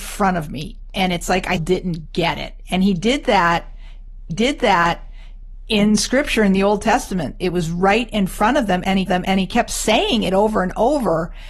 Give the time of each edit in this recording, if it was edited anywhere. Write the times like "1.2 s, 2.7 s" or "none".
1.6 s, 4.3 s, 9.1 s